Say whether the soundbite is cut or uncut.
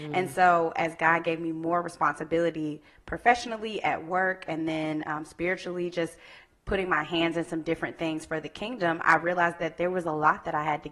uncut